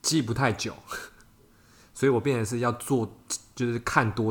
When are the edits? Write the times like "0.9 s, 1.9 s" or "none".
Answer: none